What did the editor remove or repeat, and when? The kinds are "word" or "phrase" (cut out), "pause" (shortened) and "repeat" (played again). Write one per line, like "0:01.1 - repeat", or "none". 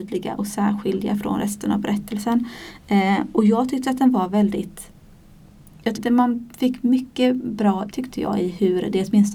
0:06.0 - word
0:07.9 - word

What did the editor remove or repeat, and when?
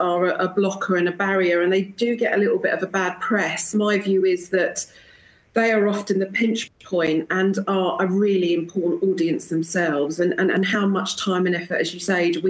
none

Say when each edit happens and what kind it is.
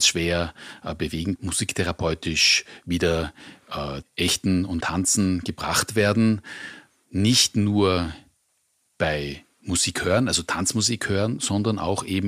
0:01.4 - word
0:04.0 - word
0:04.8 - word

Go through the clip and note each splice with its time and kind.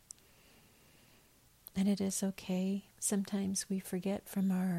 0:02.9 - pause

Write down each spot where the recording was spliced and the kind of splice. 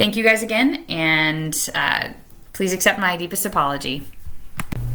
none

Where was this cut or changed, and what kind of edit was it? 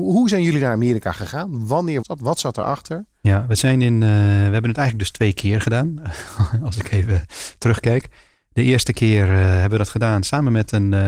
0:02.0 - word

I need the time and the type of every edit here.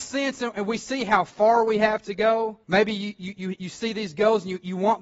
0:02.6 - pause

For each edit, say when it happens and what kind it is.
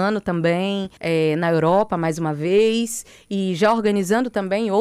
0:01.0 - pause

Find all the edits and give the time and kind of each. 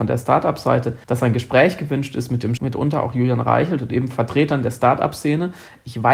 0:01.0 - pause
0:02.6 - phrase

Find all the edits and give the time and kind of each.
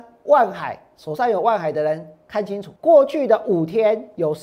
0:02.8 - pause

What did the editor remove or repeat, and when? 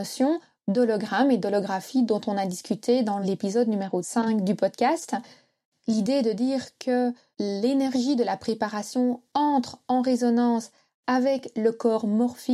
none

